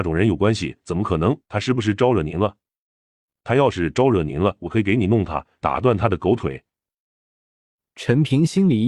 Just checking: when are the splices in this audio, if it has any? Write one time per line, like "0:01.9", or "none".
0:01.4

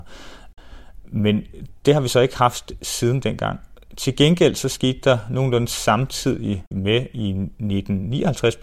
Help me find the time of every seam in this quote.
none

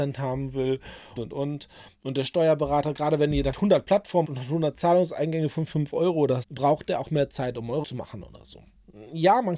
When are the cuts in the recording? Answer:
0:01.2
0:03.5
0:04.2
0:06.4
0:07.8

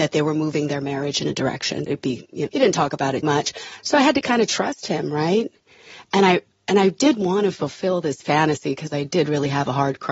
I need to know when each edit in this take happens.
0:01.3
0:01.9
0:02.5
0:03.2

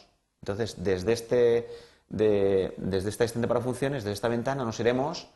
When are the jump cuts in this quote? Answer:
none

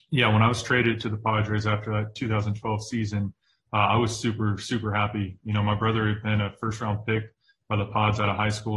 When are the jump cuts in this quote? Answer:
none

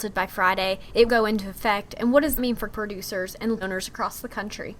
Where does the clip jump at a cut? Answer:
0:01.1
0:02.4
0:02.7
0:03.6

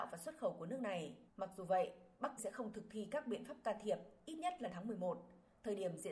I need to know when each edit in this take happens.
0:01.3
0:02.4
0:04.7

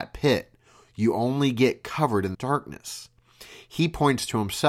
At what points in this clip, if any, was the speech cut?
0:02.3

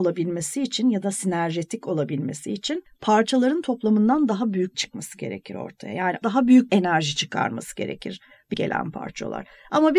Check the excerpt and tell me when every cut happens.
0:04.7
0:06.2
0:06.7
0:08.5

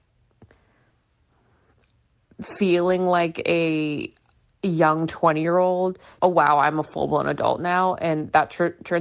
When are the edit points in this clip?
0:06.2

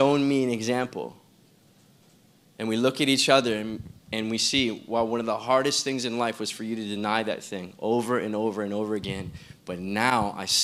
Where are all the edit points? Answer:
none

